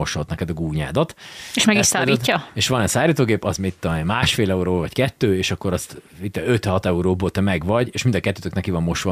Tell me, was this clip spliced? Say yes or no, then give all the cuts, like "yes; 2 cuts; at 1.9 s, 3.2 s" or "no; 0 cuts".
no; 0 cuts